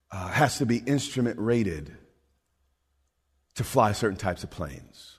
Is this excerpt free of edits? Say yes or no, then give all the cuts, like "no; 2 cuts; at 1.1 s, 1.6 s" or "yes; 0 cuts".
yes; 0 cuts